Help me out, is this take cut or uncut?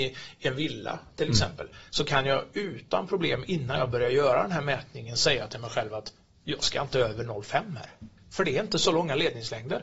uncut